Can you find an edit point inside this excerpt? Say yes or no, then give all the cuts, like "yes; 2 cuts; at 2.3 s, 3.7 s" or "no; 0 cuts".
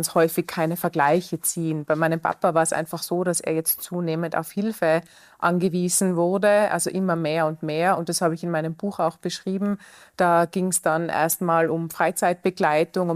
no; 0 cuts